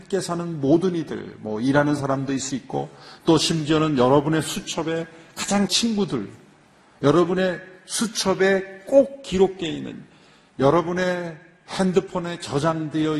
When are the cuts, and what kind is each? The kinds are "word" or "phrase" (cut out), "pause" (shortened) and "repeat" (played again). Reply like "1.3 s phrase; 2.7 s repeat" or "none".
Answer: 2.5 s word; 5.7 s word